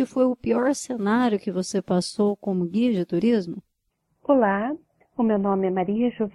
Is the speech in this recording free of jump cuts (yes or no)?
yes